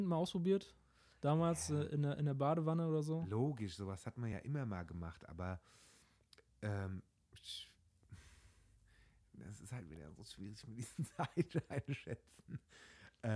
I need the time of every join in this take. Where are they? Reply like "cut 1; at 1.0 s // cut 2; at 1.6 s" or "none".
none